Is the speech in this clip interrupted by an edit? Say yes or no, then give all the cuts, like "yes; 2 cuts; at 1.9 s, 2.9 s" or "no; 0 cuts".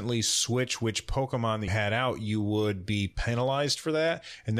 yes; 1 cut; at 1.7 s